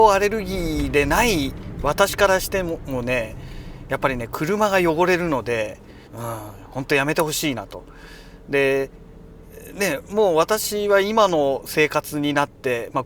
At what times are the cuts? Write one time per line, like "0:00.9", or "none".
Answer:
0:06.1